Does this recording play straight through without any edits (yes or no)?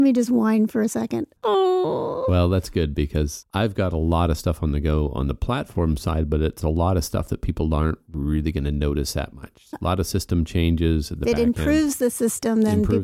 no